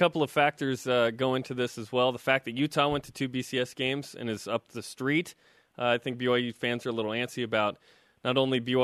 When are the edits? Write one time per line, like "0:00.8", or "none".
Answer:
none

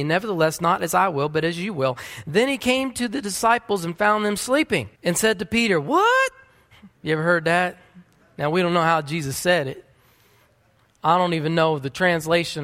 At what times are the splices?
0:05.0
0:07.0

